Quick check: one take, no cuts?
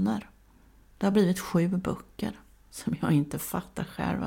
yes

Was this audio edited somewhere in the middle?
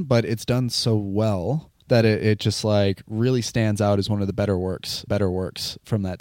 yes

